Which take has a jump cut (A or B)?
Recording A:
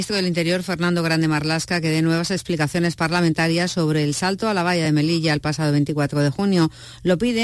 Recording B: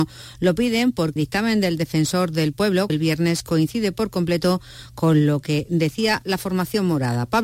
B